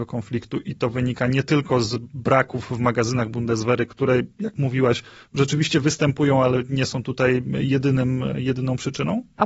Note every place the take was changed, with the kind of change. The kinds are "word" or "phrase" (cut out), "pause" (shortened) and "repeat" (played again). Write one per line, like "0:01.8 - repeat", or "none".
none